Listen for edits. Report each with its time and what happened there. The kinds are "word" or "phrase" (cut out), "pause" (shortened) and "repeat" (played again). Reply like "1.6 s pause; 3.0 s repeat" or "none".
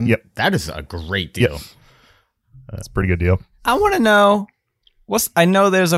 none

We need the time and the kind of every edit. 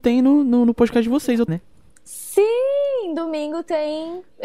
1.5 s word

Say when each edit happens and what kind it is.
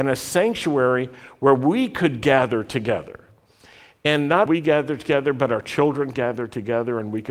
4.5 s phrase; 6.1 s word

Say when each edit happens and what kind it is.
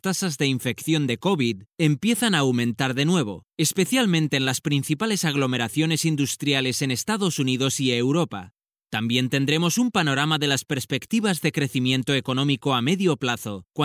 none

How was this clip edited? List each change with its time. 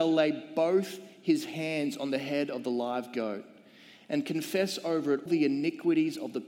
5.3 s word

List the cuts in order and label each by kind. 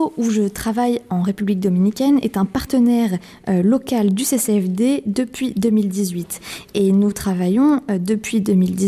none

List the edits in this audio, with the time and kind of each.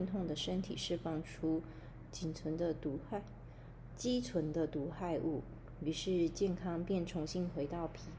3.9 s word

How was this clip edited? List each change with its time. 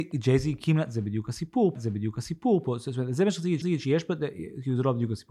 1.8 s repeat; 3.6 s repeat

